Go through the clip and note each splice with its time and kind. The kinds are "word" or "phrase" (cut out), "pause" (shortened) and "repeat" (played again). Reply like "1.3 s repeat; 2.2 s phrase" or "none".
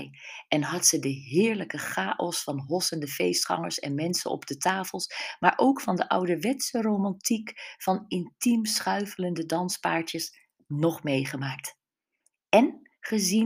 none